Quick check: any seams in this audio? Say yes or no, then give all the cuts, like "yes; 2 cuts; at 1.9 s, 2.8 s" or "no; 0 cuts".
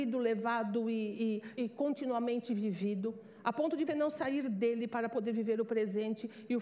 yes; 2 cuts; at 1.6 s, 3.9 s